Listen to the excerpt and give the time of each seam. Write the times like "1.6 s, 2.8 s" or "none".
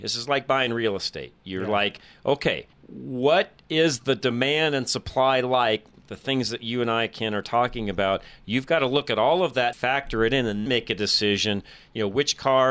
2.7 s, 9.7 s, 10.7 s